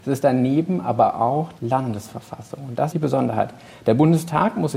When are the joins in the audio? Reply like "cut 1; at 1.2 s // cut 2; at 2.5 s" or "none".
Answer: cut 1; at 1.6 s // cut 2; at 2.9 s